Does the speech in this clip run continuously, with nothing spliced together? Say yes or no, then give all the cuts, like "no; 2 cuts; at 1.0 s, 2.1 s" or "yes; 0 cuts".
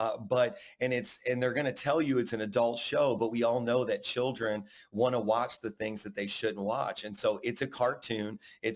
yes; 0 cuts